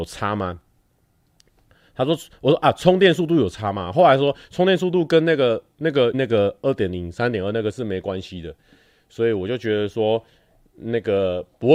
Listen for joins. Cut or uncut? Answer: cut